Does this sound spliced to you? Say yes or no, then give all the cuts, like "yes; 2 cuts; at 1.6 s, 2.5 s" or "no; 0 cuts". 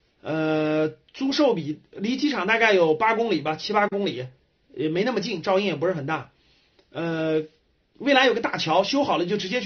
no; 0 cuts